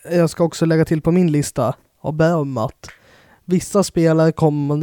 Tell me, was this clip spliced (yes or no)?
no